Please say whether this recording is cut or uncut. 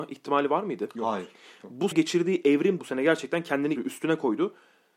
cut